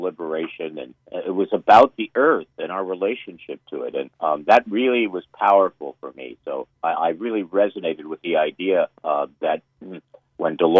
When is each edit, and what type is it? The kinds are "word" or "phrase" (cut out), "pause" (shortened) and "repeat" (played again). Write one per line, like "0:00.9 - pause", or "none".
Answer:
0:01.0 - pause
0:04.1 - pause
0:06.8 - pause
0:09.0 - pause